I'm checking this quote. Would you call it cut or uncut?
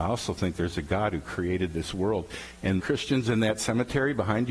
cut